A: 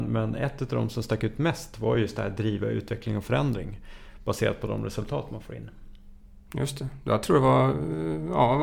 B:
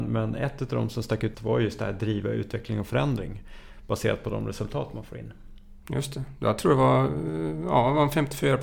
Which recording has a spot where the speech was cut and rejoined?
B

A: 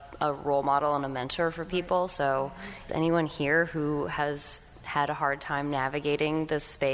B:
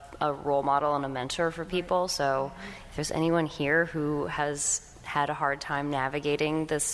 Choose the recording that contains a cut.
A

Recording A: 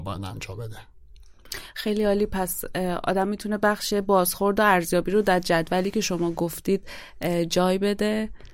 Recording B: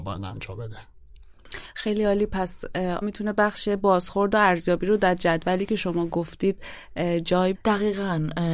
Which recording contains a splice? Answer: B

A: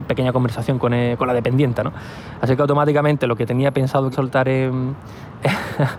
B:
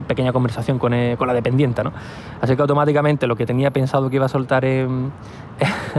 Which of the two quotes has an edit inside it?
A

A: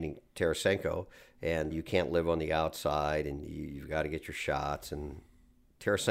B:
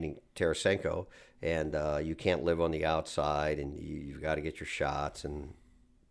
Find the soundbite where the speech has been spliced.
A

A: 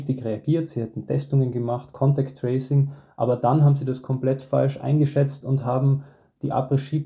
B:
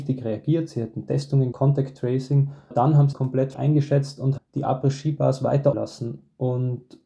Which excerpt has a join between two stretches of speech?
B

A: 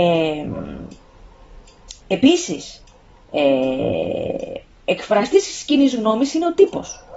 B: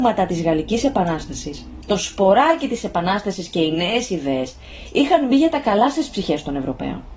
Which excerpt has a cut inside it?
A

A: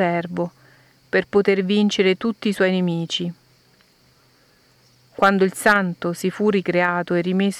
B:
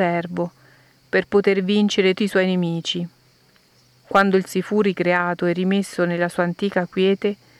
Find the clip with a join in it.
B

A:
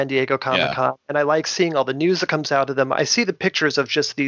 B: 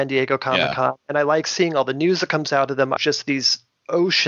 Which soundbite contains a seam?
B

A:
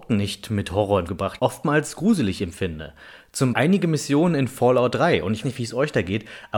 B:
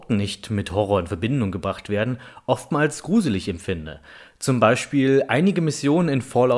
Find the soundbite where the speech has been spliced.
A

